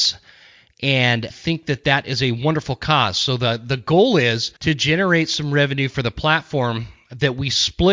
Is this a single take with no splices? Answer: no; 2 cuts; at 1.3 s, 4.6 s

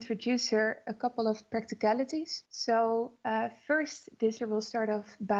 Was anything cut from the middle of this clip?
yes; 2 cuts; at 2.5 s, 4.4 s

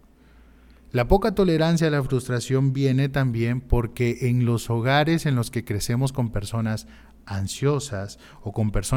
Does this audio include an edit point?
no; 0 cuts

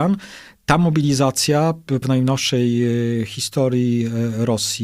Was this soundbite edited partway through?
yes; 1 cut; at 2.0 s

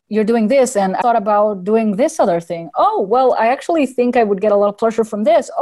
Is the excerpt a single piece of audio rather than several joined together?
no; 1 cut; at 1.0 s

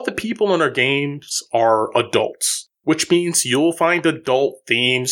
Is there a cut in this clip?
yes; 1 cut; at 2.7 s

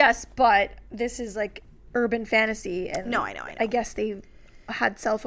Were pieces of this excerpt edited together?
no; 0 cuts

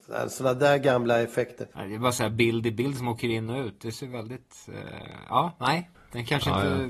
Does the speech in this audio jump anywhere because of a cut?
yes; 1 cut; at 1.7 s

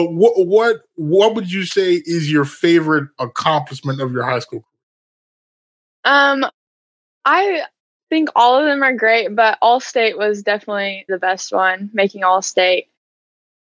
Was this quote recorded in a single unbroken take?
no; 1 cut; at 11.1 s

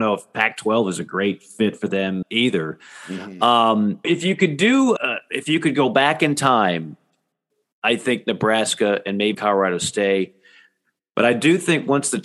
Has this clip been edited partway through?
yes; 4 cuts; at 2.2 s, 4.0 s, 5.0 s, 9.3 s

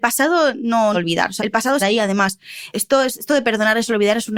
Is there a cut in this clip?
yes; 4 cuts; at 0.9 s, 1.4 s, 1.8 s, 2.7 s

